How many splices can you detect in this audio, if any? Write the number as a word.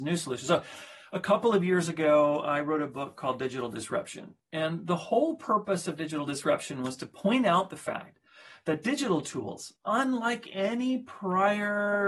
zero